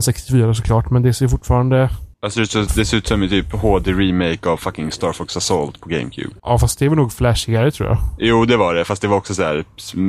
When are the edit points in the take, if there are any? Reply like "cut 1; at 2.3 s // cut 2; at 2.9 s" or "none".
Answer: cut 1; at 2.1 s // cut 2; at 6.4 s